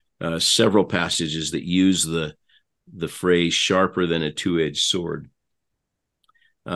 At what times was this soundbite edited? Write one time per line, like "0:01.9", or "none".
none